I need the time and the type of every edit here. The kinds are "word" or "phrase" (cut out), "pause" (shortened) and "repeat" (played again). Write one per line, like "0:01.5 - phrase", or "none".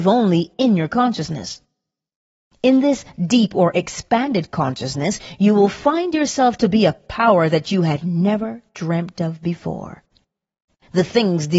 none

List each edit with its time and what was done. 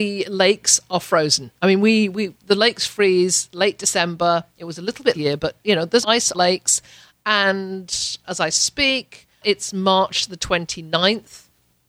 0:01.6 - pause
0:04.5 - pause
0:05.1 - phrase
0:06.0 - word
0:06.3 - phrase
0:08.2 - word
0:09.4 - word

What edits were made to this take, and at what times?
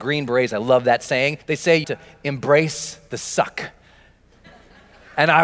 0:01.4 - pause
0:01.8 - word

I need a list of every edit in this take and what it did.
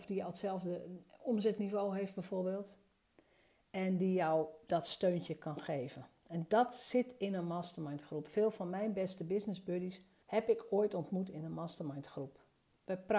0:10.2 - pause

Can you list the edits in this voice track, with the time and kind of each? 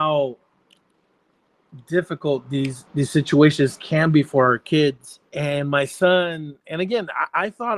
0:02.9 - word
0:05.3 - pause

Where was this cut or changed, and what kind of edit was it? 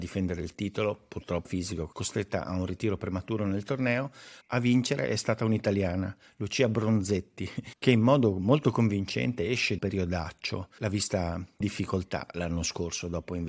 0:01.4 - phrase
0:01.9 - word
0:09.8 - word
0:11.6 - word

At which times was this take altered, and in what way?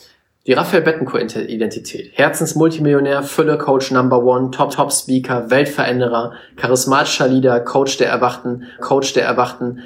0:04.7 - repeat
0:08.8 - repeat

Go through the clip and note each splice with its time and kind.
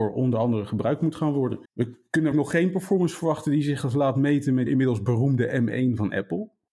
0:01.6 - pause
0:02.3 - word
0:04.7 - phrase

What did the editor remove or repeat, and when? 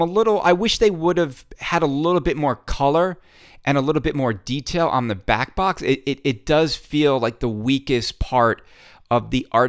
none

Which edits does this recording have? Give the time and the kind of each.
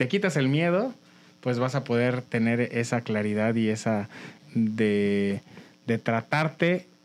0:04.4 - phrase

